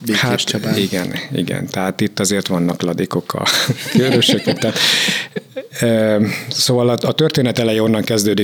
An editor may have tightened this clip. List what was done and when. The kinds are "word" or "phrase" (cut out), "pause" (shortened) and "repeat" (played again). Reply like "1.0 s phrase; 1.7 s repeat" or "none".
none